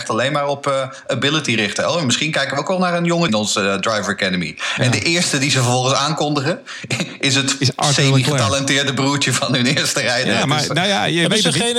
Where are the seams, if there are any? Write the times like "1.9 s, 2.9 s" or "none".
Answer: 3.3 s